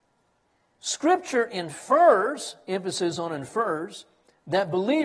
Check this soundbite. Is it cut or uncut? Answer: uncut